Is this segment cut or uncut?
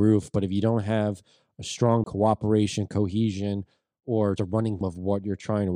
cut